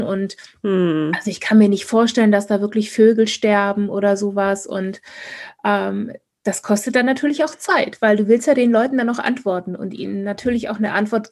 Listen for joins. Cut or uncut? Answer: uncut